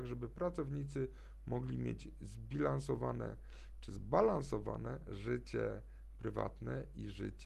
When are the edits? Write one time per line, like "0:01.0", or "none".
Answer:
none